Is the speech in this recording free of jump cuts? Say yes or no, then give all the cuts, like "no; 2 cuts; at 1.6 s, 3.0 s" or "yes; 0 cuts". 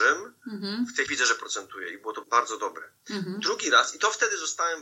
no; 2 cuts; at 1.1 s, 2.2 s